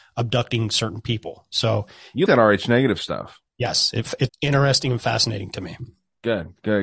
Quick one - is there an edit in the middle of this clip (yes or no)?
yes